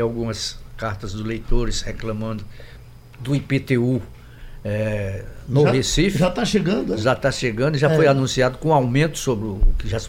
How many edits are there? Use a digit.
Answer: 0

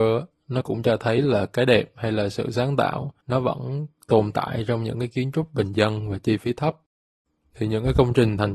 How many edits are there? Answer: 1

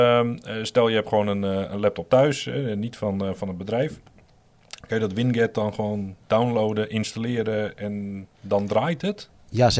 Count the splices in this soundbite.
2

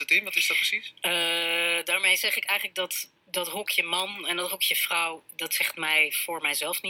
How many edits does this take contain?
0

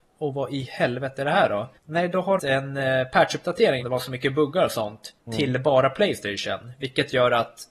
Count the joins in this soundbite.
4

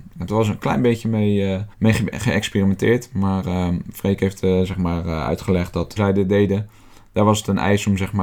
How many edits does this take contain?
2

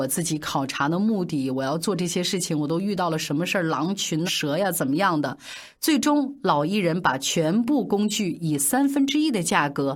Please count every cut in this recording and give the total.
1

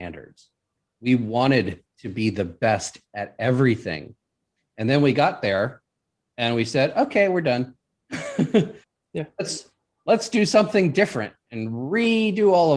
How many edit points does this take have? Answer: 1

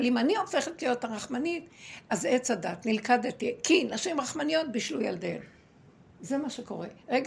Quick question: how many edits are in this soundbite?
1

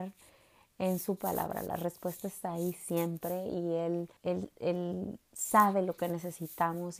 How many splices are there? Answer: 2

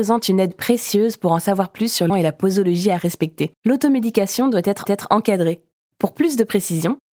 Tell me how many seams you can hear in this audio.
3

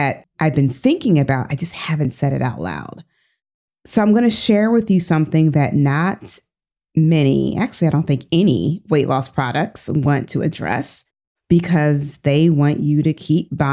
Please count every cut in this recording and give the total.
0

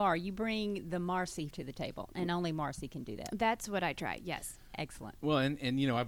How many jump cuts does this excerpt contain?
1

